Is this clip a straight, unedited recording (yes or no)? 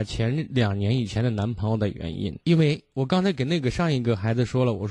no